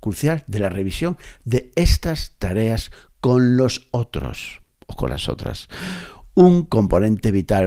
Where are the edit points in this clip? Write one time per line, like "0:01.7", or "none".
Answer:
none